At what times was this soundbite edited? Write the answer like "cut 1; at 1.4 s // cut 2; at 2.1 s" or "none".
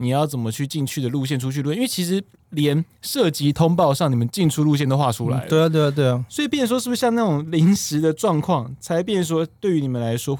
none